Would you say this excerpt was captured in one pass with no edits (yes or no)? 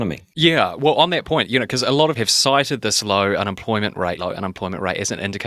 no